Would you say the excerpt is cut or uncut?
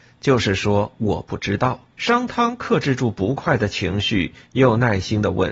cut